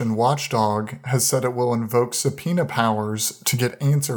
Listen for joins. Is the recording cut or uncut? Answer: uncut